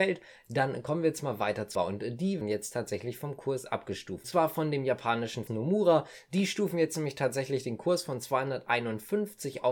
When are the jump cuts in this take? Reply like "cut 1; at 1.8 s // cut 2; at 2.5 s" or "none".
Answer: cut 1; at 1.7 s // cut 2; at 2.4 s // cut 3; at 4.2 s // cut 4; at 5.5 s